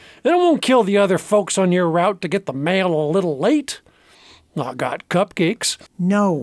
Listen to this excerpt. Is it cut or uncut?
uncut